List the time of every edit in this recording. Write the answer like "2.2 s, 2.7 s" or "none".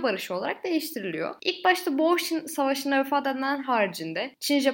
none